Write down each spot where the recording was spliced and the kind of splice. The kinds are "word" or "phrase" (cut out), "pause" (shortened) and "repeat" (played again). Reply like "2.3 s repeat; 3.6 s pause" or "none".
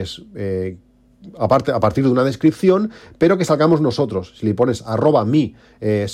none